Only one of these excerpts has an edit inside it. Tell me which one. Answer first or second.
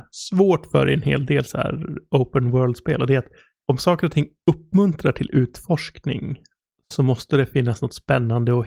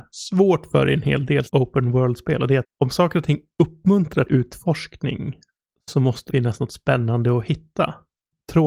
second